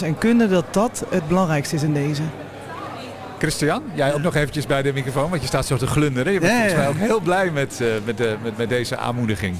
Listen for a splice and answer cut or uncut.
uncut